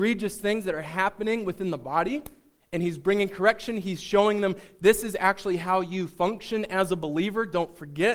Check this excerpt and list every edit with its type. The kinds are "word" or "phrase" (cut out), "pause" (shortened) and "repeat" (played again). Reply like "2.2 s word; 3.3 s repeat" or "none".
2.6 s pause